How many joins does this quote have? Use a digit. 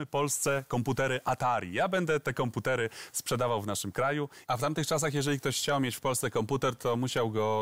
0